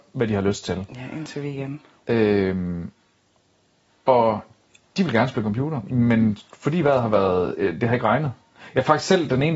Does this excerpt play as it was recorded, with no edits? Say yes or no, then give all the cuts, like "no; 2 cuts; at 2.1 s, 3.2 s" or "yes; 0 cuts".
yes; 0 cuts